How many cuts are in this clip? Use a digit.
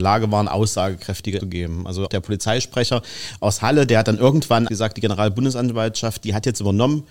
3